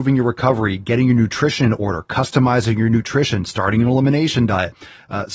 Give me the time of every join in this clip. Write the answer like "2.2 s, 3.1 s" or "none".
none